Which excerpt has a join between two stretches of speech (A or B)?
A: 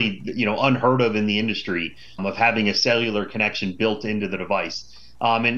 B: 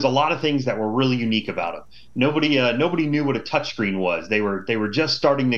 A